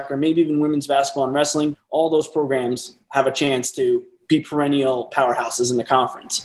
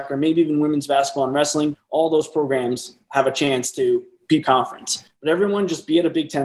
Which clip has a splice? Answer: second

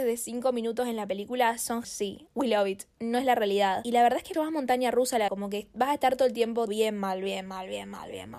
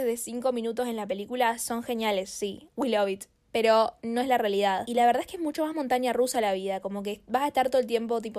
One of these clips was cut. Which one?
first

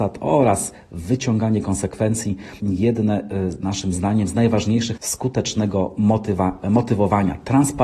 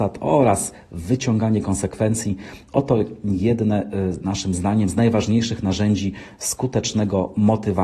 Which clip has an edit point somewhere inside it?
first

